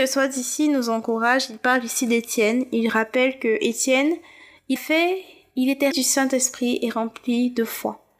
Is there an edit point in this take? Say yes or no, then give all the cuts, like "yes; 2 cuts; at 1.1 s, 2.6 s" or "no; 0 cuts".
yes; 2 cuts; at 4.8 s, 5.9 s